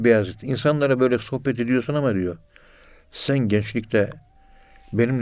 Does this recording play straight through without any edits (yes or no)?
yes